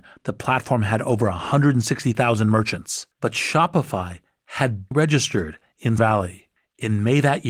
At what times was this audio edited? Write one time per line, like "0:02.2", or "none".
0:03.1
0:04.9
0:06.0
0:06.6